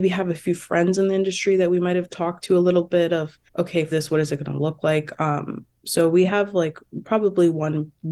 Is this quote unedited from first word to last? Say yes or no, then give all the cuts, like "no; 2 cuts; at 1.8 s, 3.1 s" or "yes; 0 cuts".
no; 2 cuts; at 3.5 s, 3.9 s